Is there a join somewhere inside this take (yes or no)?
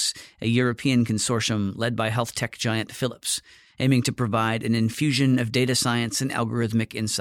no